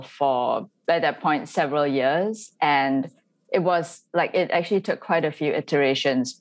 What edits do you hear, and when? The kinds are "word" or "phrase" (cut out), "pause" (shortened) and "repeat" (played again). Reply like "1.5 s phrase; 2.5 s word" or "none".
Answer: none